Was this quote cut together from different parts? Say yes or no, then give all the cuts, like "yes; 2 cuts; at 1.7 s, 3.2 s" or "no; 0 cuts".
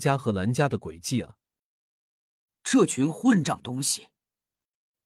no; 0 cuts